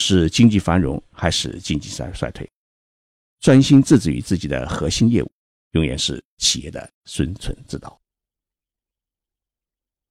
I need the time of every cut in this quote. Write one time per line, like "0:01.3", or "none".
0:06.9